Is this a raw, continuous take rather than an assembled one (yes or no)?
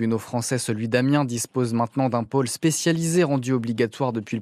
yes